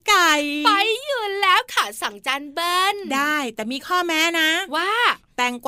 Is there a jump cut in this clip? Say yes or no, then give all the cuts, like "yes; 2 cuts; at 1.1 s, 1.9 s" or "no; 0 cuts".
no; 0 cuts